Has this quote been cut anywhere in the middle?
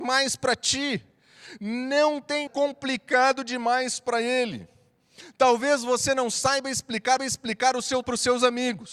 yes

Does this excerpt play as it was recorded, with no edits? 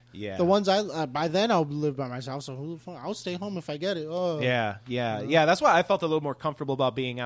yes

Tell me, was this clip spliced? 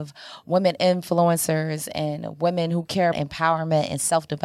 yes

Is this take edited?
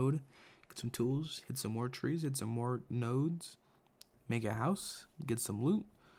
no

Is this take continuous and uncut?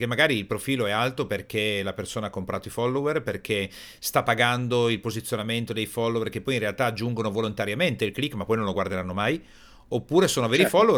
yes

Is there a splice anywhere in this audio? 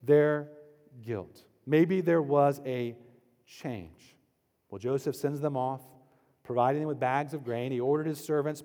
no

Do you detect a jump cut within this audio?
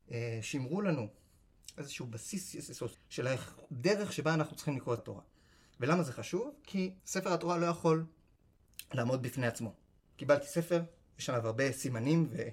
yes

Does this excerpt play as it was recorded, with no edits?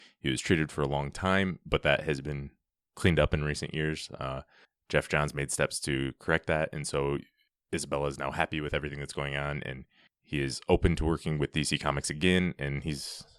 yes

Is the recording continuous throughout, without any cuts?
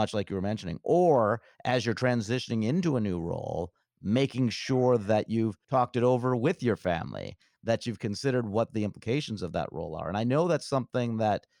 yes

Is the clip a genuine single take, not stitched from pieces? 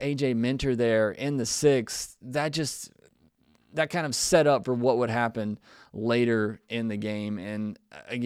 yes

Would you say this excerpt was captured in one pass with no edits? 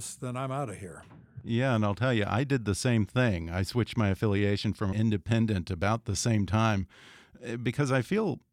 no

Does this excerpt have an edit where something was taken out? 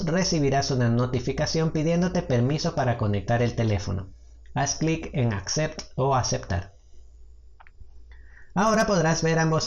no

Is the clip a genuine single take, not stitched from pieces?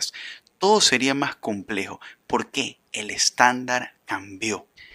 yes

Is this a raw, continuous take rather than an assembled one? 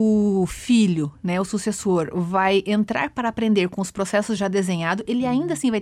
yes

